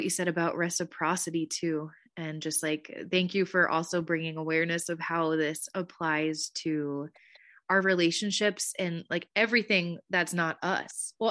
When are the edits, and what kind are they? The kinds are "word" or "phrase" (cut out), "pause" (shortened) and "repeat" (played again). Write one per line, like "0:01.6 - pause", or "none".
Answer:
none